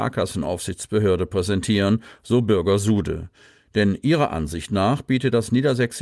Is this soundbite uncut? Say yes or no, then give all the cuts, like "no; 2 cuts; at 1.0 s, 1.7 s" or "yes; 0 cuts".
yes; 0 cuts